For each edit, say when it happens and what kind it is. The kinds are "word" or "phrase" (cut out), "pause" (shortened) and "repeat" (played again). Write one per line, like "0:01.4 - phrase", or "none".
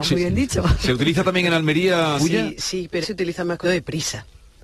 0:02.2 - word
0:03.0 - word
0:03.6 - phrase